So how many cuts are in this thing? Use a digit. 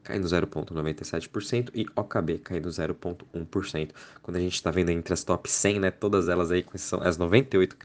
0